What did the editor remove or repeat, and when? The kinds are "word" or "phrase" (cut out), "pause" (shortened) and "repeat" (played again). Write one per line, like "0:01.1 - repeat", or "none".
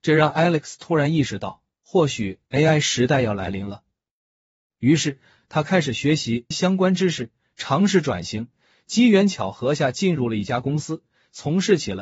0:06.5 - word